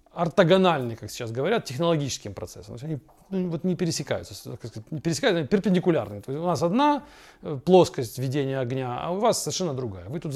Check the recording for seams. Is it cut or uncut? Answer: uncut